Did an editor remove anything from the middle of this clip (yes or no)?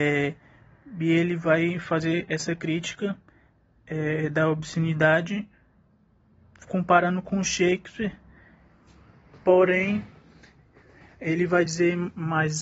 no